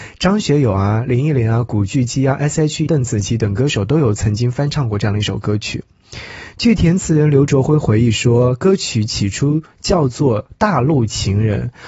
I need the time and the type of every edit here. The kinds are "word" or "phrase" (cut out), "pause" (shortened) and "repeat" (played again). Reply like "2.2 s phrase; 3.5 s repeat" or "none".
2.9 s word